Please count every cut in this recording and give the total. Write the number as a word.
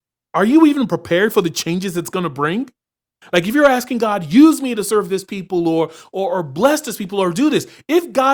zero